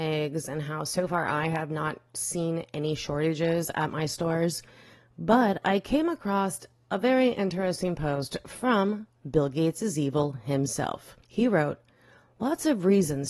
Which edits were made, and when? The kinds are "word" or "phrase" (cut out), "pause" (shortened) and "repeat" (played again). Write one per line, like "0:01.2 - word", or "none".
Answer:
0:11.2 - pause